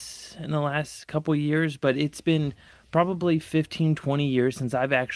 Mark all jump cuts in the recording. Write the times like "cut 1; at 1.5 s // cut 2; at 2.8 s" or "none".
none